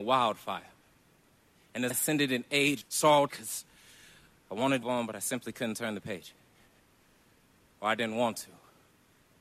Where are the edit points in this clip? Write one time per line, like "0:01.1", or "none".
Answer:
0:01.9
0:02.8
0:03.3
0:04.8